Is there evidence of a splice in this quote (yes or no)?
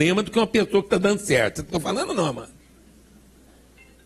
yes